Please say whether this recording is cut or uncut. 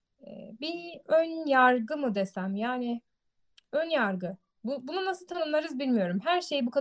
uncut